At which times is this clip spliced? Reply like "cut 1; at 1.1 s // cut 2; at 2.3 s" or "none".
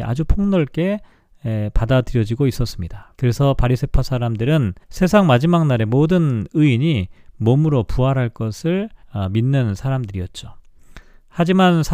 cut 1; at 3.1 s // cut 2; at 4.8 s // cut 3; at 9.0 s